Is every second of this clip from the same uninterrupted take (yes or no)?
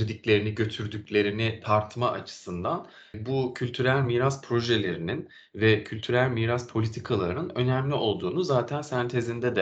yes